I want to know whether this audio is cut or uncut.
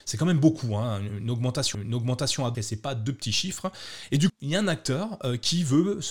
cut